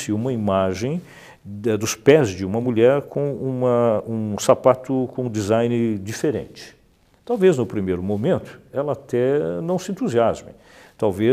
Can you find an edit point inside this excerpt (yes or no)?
no